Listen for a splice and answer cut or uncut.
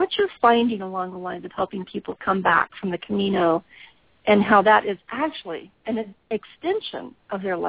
cut